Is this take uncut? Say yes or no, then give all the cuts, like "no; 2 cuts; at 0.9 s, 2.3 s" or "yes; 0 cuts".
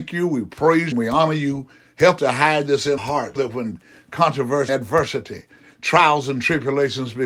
no; 5 cuts; at 0.9 s, 2.2 s, 3.0 s, 3.4 s, 4.7 s